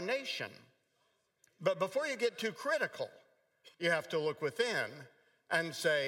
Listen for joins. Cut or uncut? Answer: cut